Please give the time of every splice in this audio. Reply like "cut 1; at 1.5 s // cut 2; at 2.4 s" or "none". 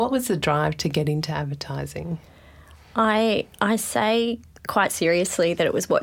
none

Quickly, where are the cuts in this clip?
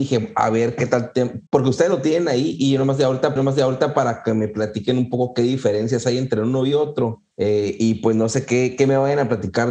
cut 1; at 1.5 s // cut 2; at 3.4 s // cut 3; at 7.3 s

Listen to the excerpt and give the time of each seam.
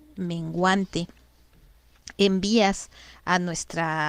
none

